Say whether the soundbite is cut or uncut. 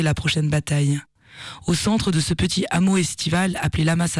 uncut